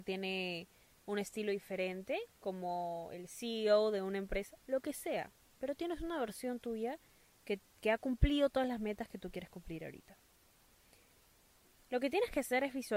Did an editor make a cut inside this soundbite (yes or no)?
no